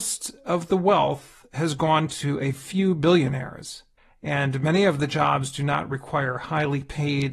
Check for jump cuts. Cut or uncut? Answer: cut